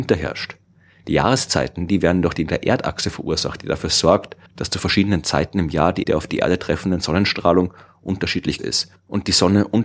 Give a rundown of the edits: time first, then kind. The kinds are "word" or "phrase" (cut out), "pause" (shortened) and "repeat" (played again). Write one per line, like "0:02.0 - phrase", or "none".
0:02.5 - word
0:04.5 - pause
0:06.0 - word
0:08.6 - word